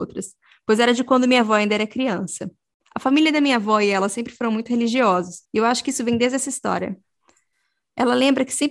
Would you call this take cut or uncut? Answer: cut